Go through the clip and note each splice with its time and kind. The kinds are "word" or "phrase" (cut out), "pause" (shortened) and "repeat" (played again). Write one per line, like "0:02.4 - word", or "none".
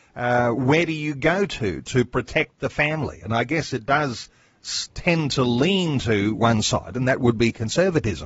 none